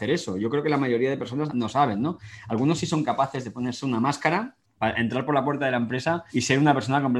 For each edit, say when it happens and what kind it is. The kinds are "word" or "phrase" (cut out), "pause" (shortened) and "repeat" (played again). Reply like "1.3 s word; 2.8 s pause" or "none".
1.5 s word; 4.6 s pause; 6.3 s pause